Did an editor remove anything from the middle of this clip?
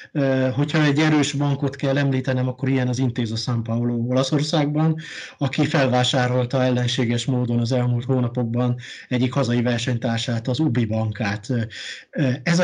no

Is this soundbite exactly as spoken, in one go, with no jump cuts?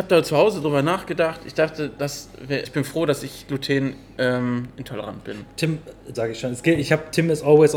no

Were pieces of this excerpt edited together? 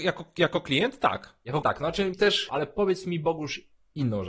yes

